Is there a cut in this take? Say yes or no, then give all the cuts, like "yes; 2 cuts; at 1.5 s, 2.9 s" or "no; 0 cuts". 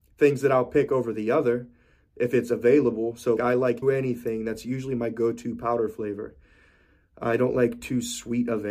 yes; 2 cuts; at 3.4 s, 3.8 s